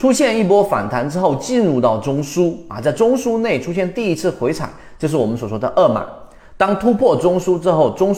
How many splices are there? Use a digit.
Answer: 0